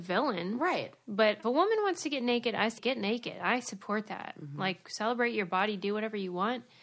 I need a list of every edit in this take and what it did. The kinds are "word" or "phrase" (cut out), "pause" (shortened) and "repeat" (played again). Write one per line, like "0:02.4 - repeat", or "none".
0:01.4 - phrase
0:02.8 - word